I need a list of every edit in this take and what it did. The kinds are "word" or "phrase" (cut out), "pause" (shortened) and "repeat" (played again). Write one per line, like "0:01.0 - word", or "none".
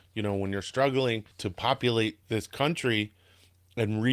0:01.3 - pause
0:02.2 - word